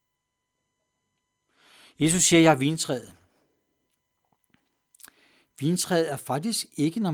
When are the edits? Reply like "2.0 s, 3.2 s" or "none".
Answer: none